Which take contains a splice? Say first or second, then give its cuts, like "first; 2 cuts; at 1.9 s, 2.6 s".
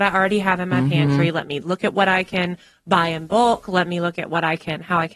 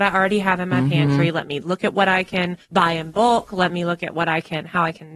second; 1 cut; at 2.6 s